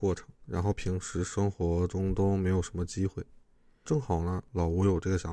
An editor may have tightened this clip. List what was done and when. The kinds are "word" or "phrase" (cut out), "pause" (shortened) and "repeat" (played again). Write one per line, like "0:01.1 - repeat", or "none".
none